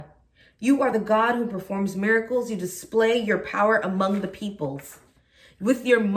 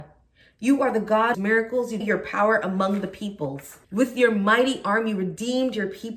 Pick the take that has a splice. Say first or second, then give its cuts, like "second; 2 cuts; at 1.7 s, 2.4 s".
second; 3 cuts; at 1.3 s, 2.0 s, 3.8 s